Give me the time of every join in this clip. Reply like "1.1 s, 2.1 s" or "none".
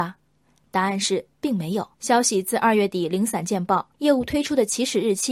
1.9 s, 3.9 s